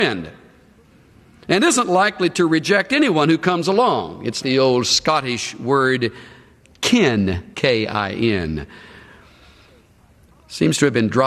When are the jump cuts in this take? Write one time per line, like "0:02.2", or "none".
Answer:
0:04.4
0:07.5